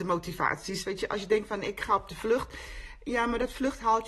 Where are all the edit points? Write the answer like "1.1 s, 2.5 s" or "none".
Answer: none